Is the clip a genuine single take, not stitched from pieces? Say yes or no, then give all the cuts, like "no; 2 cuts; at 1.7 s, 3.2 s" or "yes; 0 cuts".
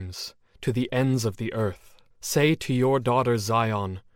no; 1 cut; at 2.1 s